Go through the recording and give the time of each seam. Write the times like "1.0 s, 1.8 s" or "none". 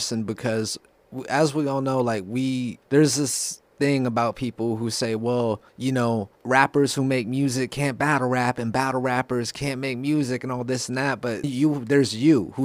2.8 s, 5.7 s, 6.3 s, 11.4 s